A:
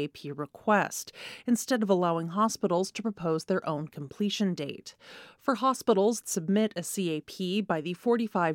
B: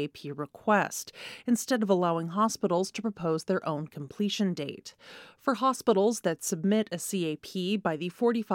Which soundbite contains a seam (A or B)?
A